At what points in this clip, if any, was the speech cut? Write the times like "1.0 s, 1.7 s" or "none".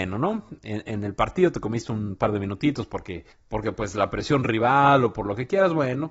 3.3 s